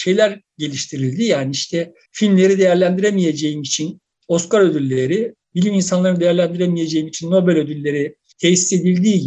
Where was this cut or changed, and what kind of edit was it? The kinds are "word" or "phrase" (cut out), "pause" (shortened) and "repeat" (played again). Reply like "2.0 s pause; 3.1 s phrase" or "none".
5.4 s pause